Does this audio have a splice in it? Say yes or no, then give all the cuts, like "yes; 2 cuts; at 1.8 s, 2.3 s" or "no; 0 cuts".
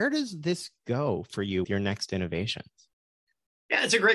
yes; 1 cut; at 1.6 s